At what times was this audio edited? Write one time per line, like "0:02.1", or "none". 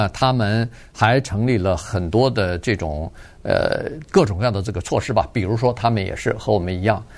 0:04.1